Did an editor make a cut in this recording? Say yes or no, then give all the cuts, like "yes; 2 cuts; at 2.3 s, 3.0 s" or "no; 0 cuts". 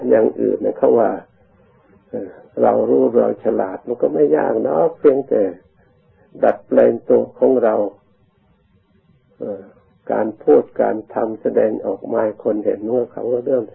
no; 0 cuts